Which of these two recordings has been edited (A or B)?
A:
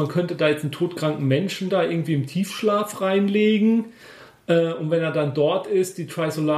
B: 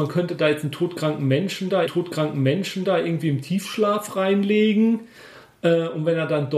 B